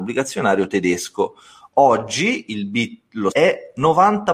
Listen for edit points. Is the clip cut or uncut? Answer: cut